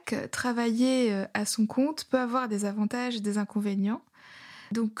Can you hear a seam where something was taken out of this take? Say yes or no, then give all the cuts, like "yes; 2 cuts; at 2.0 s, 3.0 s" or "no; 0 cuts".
no; 0 cuts